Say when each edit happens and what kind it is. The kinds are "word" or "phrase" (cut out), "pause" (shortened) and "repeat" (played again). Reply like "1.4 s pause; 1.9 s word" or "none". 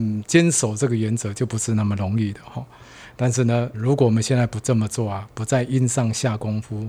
3.7 s word